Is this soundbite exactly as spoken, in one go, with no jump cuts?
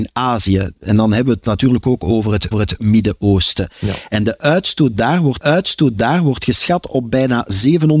no; 2 cuts; at 2.5 s, 5.4 s

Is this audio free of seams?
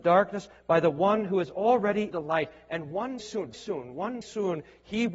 no; 4 cuts; at 2.1 s, 3.2 s, 3.5 s, 4.2 s

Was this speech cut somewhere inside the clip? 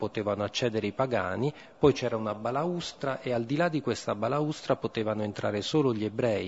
no; 0 cuts

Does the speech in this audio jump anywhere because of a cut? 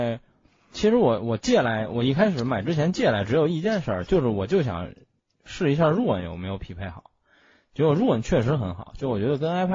no; 0 cuts

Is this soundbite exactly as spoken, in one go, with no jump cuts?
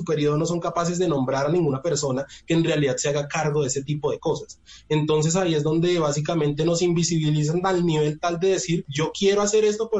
yes; 0 cuts

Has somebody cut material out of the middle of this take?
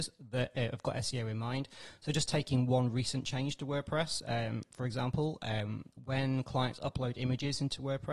no; 0 cuts

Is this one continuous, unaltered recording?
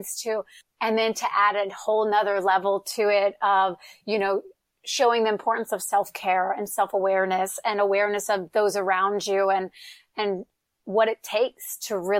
yes; 0 cuts

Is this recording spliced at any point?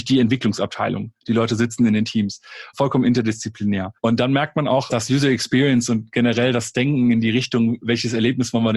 yes; 1 cut; at 4.0 s

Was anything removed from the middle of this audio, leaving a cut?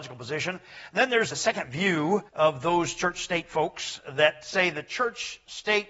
yes; 2 cuts; at 1.3 s, 2.3 s

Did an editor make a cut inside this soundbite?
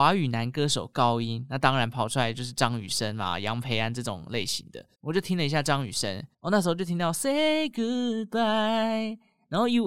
yes; 2 cuts; at 4.9 s, 6.3 s

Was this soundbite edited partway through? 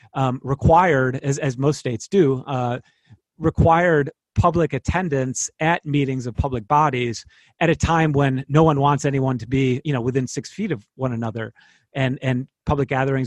no; 0 cuts

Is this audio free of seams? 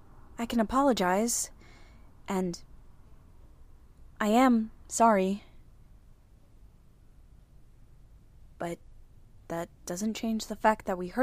yes; 0 cuts

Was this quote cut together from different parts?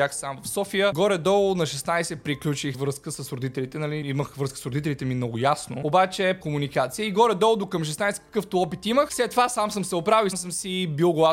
yes; 3 cuts; at 2.7 s, 6.4 s, 10.3 s

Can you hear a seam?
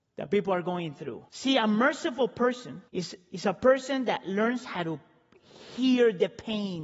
yes; 2 cuts; at 1.3 s, 2.9 s

